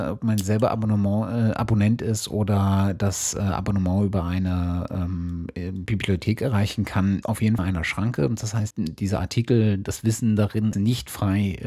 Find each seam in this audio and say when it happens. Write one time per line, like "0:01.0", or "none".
0:07.2
0:07.6
0:08.7
0:10.7